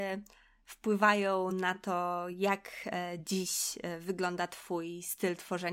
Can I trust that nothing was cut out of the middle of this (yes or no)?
yes